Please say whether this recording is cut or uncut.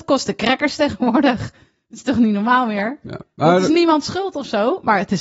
uncut